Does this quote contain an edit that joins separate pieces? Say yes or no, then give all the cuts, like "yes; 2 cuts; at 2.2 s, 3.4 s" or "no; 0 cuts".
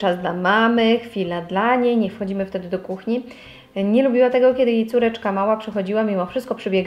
no; 0 cuts